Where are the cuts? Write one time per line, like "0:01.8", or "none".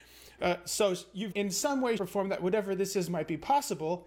0:01.3
0:02.0